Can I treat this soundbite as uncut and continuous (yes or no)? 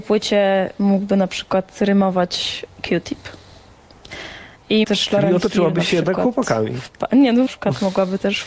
no